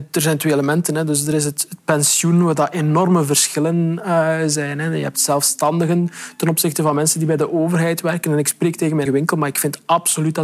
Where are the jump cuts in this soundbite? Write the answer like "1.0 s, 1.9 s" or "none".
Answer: 9.1 s

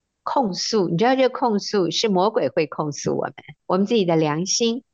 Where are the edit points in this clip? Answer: 3.6 s

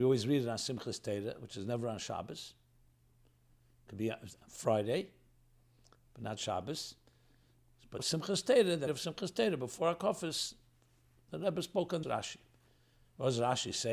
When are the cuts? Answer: 8.0 s, 8.9 s, 12.0 s

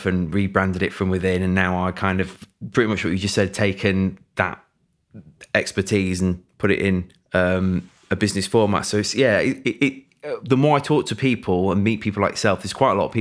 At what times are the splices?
none

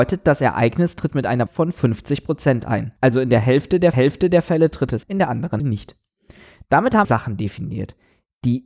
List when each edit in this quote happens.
1.5 s, 3.0 s, 3.9 s, 5.0 s, 5.6 s, 7.0 s

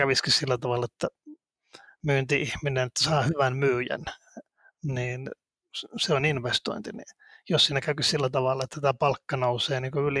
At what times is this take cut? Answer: none

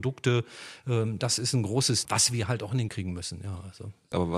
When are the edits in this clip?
2.0 s, 2.9 s

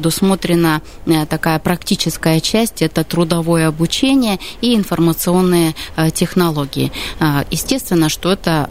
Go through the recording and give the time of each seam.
none

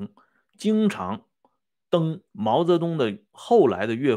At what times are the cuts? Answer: 2.3 s

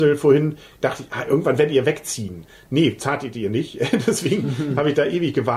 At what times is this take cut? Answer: none

